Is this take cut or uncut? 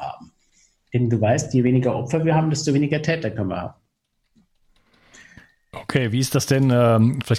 uncut